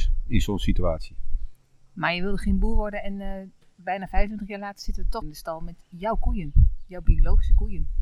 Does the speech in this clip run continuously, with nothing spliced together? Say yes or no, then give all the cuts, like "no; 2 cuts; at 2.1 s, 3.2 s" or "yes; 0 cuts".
no; 1 cut; at 5.2 s